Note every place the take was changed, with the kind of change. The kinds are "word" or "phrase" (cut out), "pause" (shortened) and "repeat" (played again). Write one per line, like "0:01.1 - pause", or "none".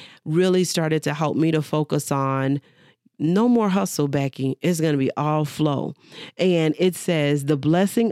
none